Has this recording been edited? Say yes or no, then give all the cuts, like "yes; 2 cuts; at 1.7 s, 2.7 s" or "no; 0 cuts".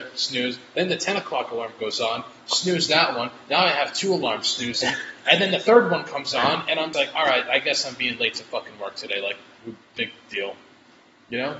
yes; 1 cut; at 6.9 s